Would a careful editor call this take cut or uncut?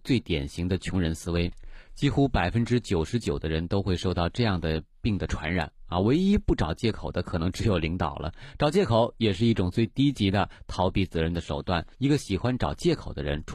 cut